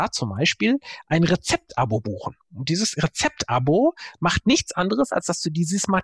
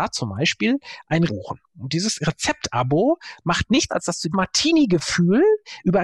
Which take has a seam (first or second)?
second